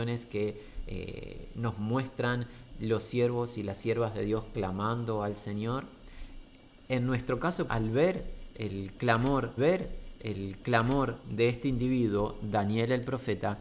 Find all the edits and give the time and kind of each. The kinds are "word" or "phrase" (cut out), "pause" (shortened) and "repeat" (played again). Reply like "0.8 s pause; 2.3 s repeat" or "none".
7.7 s word; 9.6 s repeat